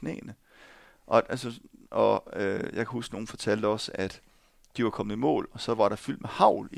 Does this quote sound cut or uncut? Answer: uncut